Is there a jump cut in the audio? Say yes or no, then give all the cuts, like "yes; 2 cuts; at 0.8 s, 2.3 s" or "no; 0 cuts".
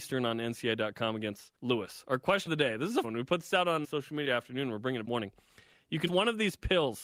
yes; 7 cuts; at 1.5 s, 2.5 s, 3.0 s, 3.8 s, 4.2 s, 5.0 s, 6.1 s